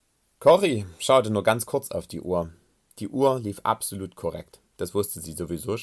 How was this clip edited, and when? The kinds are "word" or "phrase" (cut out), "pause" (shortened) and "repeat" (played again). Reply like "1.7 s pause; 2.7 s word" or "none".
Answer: none